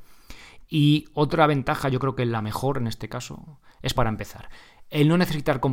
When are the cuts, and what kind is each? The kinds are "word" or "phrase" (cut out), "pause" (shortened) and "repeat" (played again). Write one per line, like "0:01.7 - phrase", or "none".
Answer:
0:04.0 - word